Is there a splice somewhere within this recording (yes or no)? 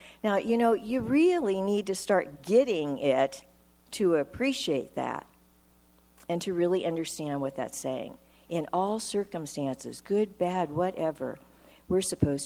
no